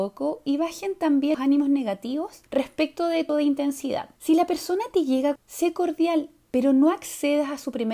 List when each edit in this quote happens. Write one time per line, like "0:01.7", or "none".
0:01.3
0:02.5
0:03.3
0:04.2
0:05.4